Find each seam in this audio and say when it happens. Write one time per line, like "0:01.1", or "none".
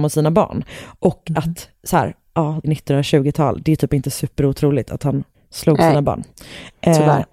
0:02.6
0:05.3

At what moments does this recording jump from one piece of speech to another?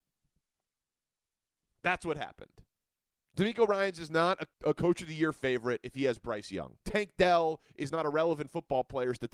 0:02.8
0:04.5
0:06.8

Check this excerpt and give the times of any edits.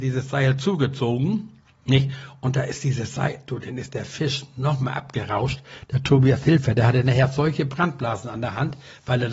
0:01.6

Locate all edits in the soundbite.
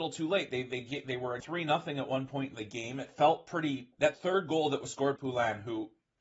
0:01.4
0:04.1
0:05.2

